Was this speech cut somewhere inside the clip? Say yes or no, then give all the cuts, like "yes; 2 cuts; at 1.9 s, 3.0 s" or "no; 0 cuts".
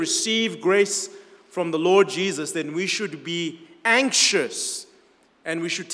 no; 0 cuts